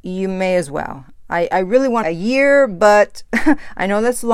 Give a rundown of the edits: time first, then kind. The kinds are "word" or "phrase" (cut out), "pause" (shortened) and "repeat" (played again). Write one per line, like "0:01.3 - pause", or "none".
0:02.0 - phrase